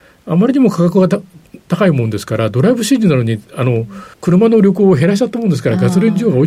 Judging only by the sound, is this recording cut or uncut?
cut